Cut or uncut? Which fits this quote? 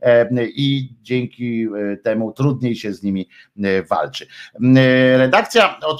uncut